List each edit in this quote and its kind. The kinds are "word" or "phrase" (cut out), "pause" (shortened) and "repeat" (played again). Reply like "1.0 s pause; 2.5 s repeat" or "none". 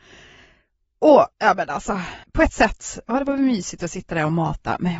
1.3 s pause; 2.2 s pause